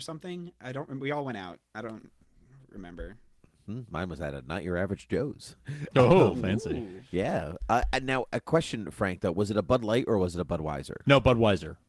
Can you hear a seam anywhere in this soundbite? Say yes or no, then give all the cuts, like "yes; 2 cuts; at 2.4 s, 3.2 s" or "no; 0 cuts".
no; 0 cuts